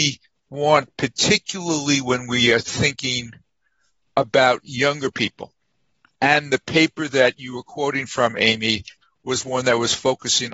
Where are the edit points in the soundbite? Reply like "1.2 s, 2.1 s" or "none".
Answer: none